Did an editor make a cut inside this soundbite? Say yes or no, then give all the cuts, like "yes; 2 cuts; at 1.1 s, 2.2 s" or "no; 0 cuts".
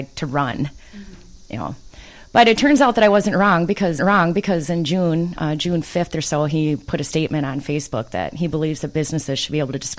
yes; 1 cut; at 4.0 s